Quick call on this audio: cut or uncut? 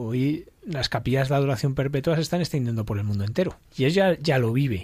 cut